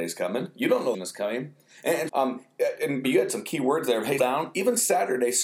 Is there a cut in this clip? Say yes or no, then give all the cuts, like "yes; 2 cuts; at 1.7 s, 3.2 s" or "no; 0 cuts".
yes; 4 cuts; at 0.9 s, 2.1 s, 3.0 s, 4.2 s